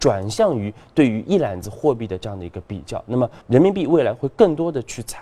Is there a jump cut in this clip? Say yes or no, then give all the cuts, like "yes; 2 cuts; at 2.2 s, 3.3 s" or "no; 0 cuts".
yes; 1 cut; at 3.4 s